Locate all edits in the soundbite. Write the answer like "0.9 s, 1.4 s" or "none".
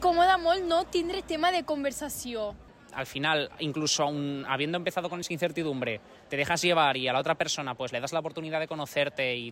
none